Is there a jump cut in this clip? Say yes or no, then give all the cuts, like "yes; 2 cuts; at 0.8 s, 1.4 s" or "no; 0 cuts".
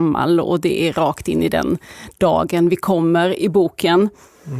no; 0 cuts